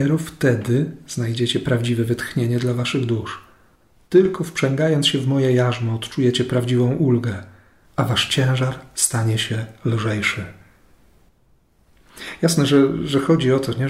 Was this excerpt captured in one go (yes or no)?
yes